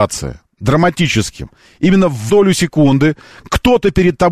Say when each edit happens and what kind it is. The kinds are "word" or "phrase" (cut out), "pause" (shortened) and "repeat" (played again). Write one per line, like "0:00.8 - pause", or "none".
0:02.3 - word